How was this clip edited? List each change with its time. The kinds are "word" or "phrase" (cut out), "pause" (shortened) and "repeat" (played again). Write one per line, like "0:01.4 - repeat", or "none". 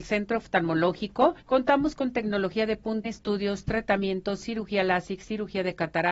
0:01.4 - pause
0:03.0 - word